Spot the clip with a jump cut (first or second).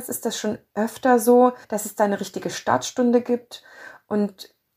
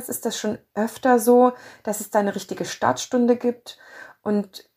first